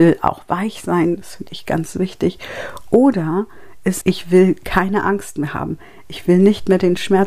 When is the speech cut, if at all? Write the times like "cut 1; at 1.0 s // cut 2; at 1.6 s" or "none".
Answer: cut 1; at 4.0 s